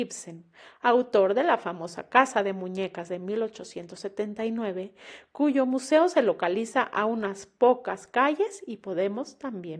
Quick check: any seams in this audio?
no; 0 cuts

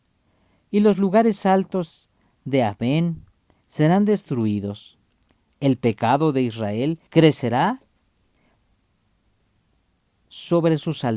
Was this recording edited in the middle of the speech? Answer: yes; 1 cut; at 7.1 s

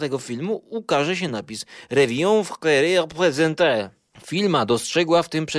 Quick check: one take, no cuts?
yes; 0 cuts

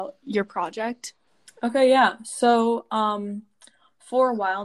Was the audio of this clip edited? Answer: yes; 1 cut; at 1.3 s

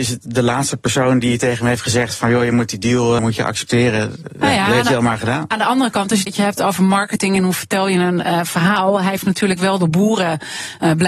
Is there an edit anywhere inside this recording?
yes; 2 cuts; at 3.2 s, 6.3 s

